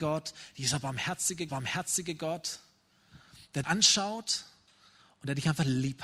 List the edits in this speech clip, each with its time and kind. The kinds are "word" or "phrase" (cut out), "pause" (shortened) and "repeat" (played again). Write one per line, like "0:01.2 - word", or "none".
0:01.5 - repeat
0:03.6 - word

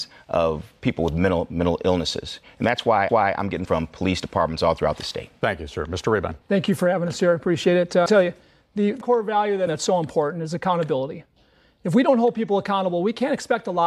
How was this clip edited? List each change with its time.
0:03.1 - repeat
0:03.6 - word
0:06.4 - pause
0:08.1 - phrase
0:09.0 - word
0:09.7 - phrase

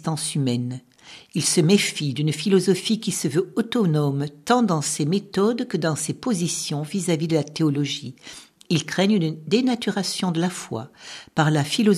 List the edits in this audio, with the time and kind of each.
none

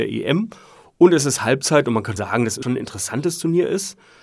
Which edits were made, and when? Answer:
0:02.2 - word
0:02.6 - word

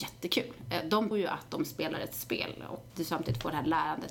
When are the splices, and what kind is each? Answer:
0:01.1 - word
0:02.9 - word

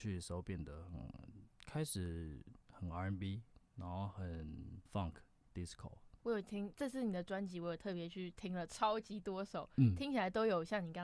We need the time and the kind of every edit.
0:01.5 - pause
0:04.9 - pause
0:06.2 - pause

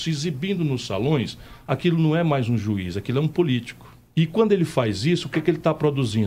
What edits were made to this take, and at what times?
0:04.1 - pause

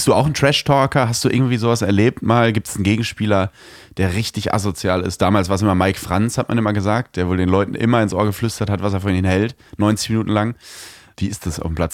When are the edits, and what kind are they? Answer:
none

